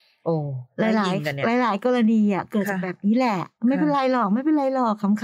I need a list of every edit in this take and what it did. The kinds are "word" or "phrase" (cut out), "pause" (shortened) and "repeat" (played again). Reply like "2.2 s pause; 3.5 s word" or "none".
3.6 s pause